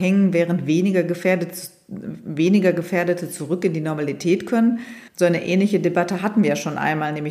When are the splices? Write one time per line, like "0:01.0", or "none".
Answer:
0:05.1

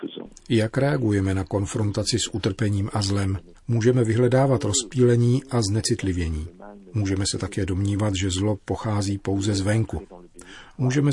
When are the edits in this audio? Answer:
0:03.5

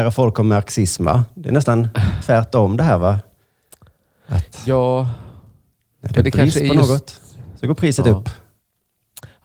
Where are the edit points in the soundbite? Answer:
none

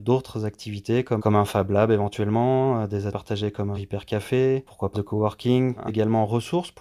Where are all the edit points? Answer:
0:01.2
0:03.1
0:03.7
0:04.9
0:05.9

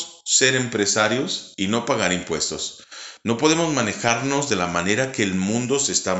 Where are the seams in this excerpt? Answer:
none

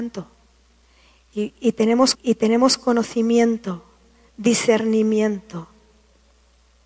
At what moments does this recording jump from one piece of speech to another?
0:02.1

